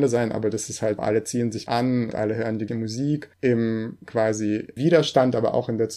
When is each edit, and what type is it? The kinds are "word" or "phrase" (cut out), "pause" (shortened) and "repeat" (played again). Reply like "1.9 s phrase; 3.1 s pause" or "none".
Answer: 1.0 s word; 1.7 s word; 2.1 s word; 2.7 s word; 4.8 s word